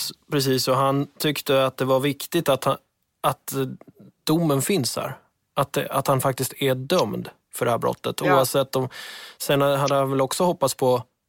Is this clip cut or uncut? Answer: uncut